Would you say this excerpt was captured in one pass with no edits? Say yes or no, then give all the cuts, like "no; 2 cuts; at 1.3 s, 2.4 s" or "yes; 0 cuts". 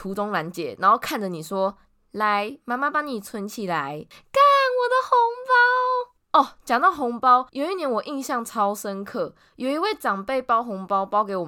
no; 1 cut; at 7.5 s